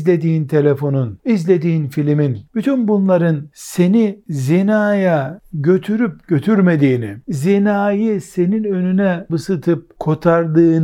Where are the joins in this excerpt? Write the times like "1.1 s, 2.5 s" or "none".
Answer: 9.3 s